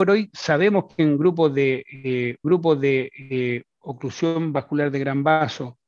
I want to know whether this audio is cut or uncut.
cut